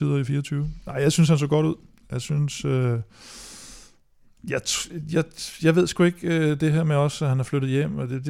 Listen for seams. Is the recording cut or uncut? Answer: uncut